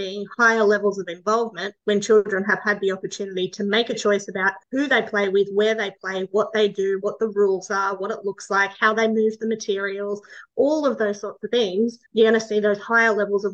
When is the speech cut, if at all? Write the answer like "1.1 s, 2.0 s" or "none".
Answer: 1.8 s, 4.6 s, 12.1 s